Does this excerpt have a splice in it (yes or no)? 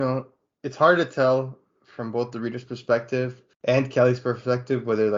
yes